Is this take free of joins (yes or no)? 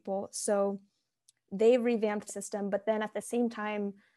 no